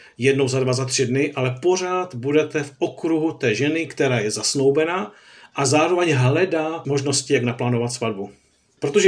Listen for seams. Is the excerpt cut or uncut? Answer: uncut